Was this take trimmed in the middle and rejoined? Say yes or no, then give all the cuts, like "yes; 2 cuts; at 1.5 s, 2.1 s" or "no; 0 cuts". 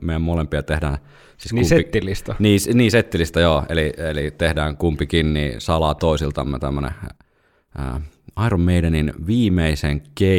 no; 0 cuts